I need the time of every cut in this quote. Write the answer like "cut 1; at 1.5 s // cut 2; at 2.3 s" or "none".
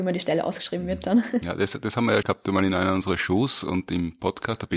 cut 1; at 2.2 s